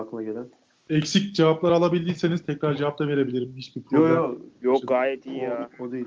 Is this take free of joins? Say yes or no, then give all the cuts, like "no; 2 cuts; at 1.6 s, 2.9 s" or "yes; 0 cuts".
yes; 0 cuts